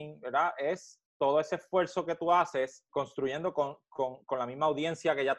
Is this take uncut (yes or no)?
no